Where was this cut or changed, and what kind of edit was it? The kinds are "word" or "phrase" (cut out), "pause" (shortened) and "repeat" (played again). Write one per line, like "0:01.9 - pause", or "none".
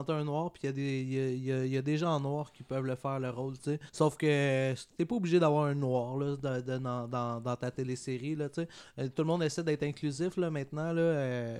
0:03.9 - pause